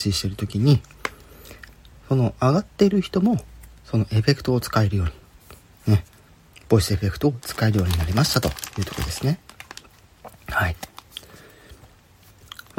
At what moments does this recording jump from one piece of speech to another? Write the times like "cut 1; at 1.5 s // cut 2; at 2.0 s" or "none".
none